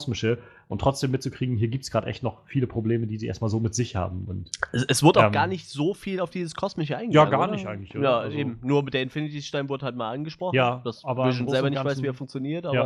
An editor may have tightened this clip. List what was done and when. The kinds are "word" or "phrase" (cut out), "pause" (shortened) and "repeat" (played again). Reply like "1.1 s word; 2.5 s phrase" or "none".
none

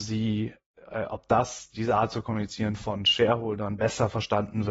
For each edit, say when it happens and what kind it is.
none

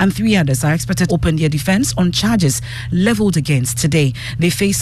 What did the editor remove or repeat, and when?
1.1 s word; 3.7 s word

